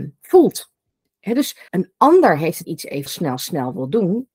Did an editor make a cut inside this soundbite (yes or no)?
yes